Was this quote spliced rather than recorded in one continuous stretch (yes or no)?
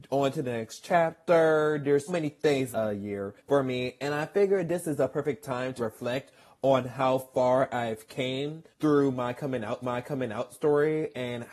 yes